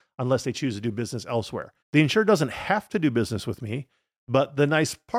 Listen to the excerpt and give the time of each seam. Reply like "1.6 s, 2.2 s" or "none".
1.8 s